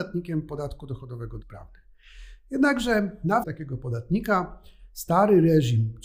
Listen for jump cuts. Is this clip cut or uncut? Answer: cut